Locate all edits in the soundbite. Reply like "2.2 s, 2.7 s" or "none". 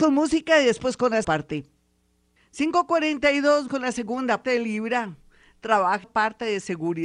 1.2 s, 3.7 s, 4.4 s, 6.0 s